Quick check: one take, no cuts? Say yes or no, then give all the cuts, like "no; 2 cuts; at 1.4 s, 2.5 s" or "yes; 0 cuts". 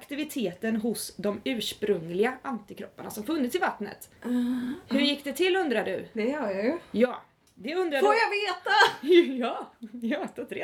no; 1 cut; at 4.2 s